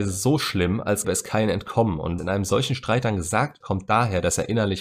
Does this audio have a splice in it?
yes; 3 cuts; at 1.0 s, 2.2 s, 3.6 s

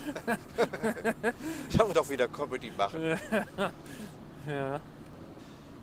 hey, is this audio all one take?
no; 1 cut; at 1.9 s

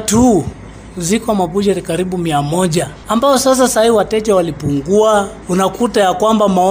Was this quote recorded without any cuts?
yes; 0 cuts

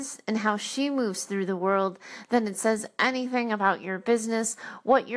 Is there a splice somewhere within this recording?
no; 0 cuts

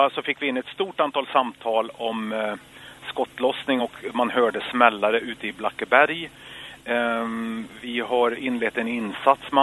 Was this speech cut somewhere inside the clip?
no; 0 cuts

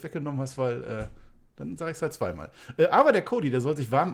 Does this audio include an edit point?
no; 0 cuts

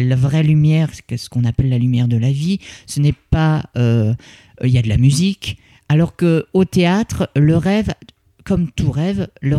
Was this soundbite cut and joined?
no; 0 cuts

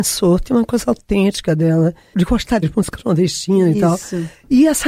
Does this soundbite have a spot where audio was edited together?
yes; 2 cuts; at 2.1 s, 2.6 s

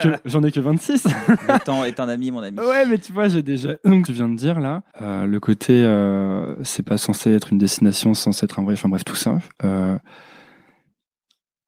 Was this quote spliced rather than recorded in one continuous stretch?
yes; 2 cuts; at 4.1 s, 4.9 s

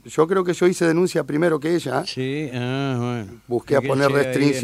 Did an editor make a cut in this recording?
no; 0 cuts

